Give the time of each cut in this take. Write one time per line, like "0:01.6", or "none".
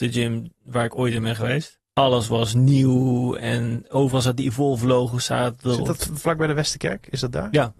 0:01.8